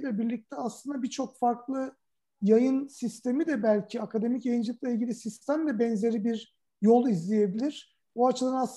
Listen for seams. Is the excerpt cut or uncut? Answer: uncut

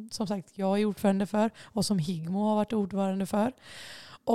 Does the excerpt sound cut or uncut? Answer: uncut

